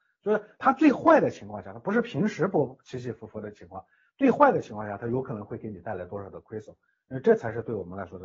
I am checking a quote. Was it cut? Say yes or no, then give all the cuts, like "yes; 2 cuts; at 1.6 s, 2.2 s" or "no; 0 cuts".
no; 0 cuts